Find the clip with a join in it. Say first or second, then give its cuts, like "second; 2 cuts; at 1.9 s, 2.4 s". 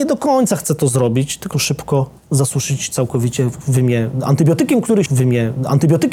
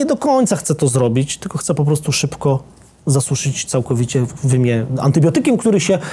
first; 3 cuts; at 1.5 s, 2.2 s, 5.1 s